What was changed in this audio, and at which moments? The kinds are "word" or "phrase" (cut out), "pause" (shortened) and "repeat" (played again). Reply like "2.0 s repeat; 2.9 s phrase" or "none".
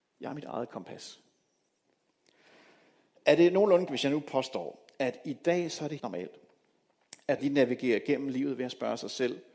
3.9 s word; 6.0 s word; 7.4 s word